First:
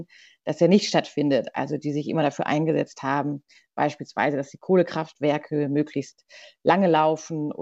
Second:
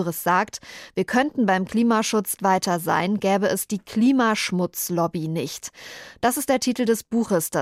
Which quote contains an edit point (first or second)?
second